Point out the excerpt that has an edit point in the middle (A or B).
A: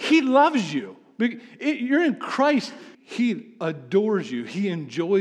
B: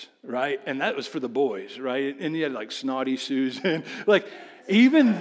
A